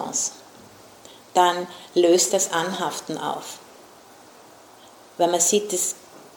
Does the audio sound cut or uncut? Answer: cut